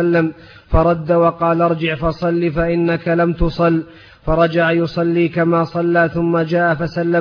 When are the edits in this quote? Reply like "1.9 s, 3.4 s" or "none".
none